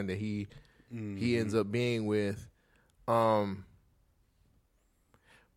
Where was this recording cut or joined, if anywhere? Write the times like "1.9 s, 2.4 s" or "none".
none